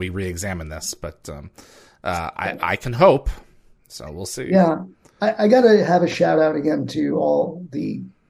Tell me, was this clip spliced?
no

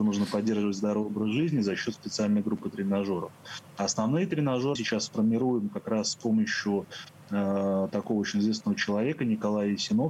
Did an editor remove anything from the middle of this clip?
yes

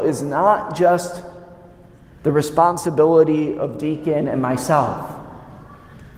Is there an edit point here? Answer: no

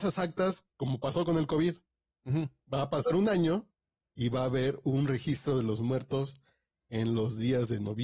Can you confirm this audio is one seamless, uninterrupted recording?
yes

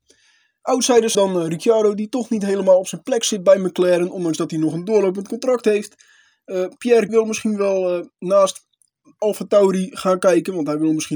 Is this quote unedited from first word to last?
no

